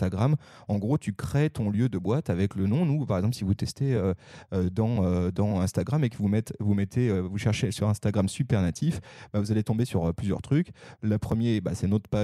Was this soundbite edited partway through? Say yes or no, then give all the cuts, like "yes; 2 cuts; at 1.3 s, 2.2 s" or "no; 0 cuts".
no; 0 cuts